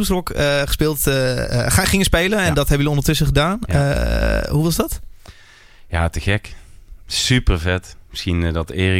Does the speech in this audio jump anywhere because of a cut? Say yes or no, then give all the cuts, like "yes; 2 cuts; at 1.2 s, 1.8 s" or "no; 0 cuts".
no; 0 cuts